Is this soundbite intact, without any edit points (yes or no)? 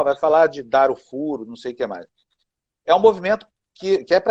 yes